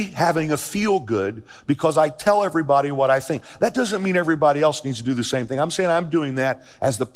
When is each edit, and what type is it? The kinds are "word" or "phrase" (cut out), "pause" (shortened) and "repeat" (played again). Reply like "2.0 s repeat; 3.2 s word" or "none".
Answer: none